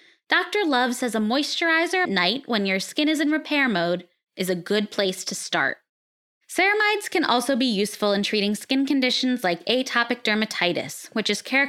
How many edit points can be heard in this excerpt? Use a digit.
1